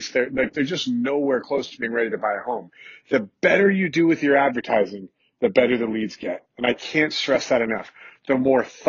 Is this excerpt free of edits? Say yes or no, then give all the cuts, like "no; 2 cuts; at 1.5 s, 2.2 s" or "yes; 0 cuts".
yes; 0 cuts